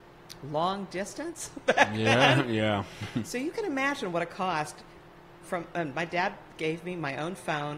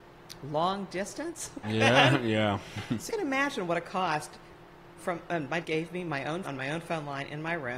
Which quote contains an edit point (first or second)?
second